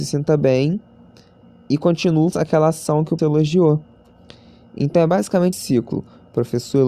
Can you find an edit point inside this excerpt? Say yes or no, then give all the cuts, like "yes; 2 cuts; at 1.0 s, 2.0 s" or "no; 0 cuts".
yes; 3 cuts; at 2.3 s, 3.2 s, 5.5 s